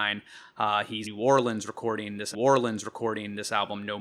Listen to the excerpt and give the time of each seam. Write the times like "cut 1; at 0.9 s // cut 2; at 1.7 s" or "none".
cut 1; at 1.0 s // cut 2; at 2.3 s